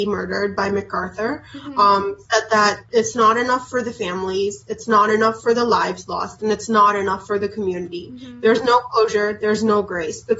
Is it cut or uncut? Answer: uncut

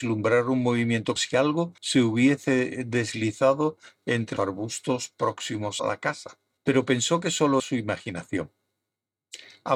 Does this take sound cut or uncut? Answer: cut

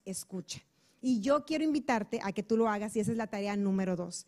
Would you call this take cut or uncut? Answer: uncut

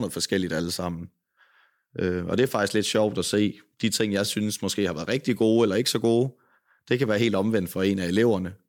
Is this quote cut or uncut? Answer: uncut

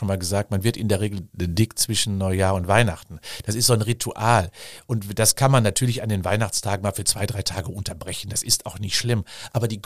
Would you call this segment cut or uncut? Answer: uncut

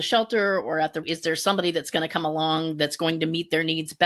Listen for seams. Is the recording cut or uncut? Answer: cut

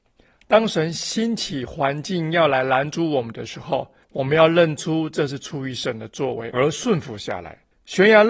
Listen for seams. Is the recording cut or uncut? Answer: cut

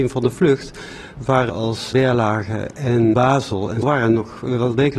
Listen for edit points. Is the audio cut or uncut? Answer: cut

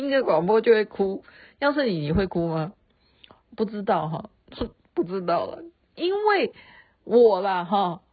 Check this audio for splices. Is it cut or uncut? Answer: uncut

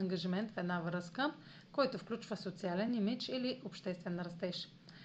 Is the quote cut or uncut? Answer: uncut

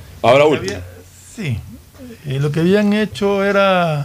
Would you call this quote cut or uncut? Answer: uncut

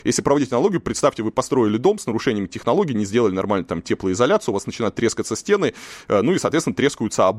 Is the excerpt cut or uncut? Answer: uncut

